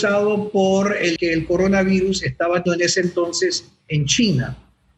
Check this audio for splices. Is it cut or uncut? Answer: cut